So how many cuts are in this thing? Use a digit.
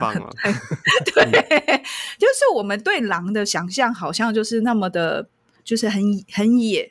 1